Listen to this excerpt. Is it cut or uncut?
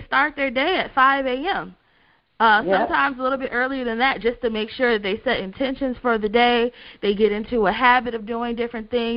uncut